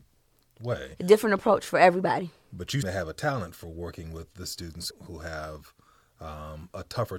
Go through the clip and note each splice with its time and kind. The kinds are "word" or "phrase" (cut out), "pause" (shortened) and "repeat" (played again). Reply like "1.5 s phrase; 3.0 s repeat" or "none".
2.8 s word; 4.9 s word